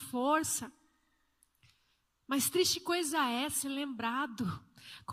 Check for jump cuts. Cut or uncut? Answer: uncut